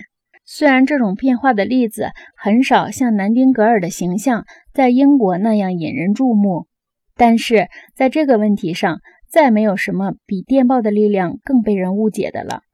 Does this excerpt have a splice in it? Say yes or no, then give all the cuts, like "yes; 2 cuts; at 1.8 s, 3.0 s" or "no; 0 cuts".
no; 0 cuts